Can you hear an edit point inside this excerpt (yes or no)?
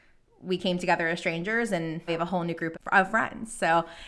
yes